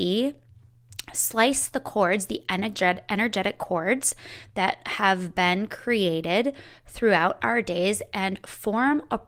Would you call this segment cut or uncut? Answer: uncut